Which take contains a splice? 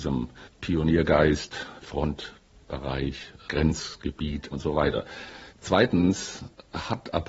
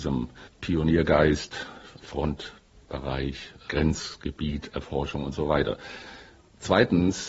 first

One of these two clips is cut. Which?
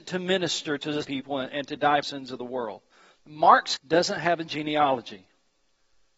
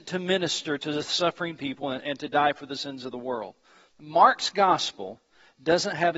first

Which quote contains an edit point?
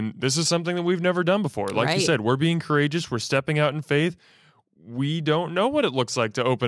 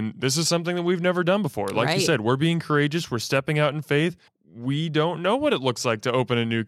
second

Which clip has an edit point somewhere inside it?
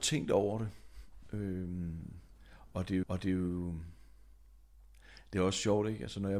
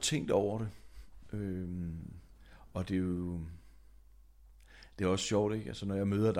first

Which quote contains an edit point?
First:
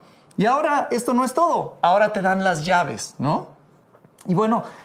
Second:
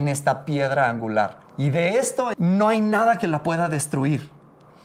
second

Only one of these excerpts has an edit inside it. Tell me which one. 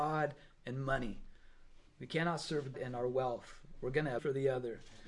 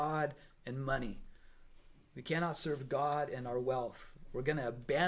first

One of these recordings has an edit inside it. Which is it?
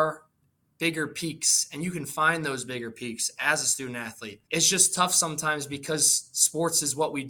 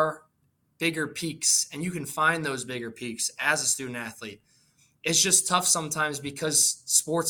first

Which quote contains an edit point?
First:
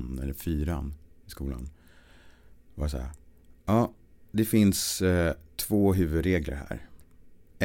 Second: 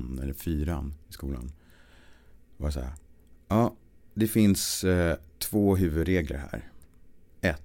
second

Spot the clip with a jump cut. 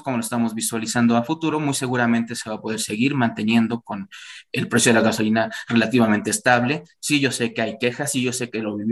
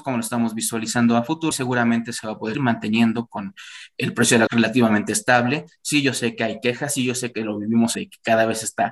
second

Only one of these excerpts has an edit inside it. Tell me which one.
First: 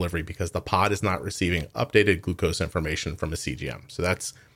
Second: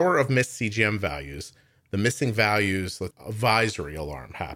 second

